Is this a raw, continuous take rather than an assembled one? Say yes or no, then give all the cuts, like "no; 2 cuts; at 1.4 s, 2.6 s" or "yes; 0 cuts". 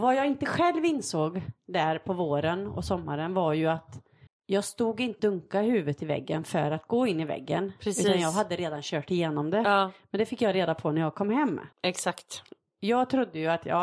no; 3 cuts; at 4.3 s, 5.2 s, 11.7 s